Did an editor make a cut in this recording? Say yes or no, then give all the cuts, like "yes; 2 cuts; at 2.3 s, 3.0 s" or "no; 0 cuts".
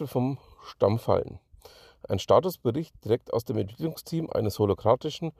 no; 0 cuts